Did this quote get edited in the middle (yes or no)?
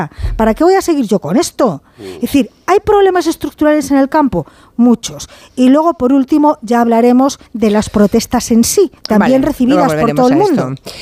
yes